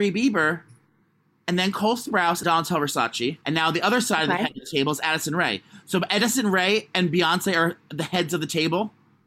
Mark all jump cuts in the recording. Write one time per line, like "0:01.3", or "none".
0:02.4
0:03.4